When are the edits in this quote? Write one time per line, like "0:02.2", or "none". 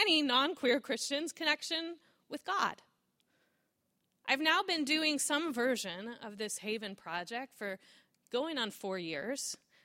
none